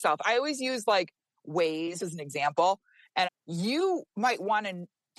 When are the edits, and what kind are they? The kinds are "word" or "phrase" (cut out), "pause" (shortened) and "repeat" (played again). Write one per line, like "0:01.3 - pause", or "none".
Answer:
0:02.0 - phrase
0:03.2 - phrase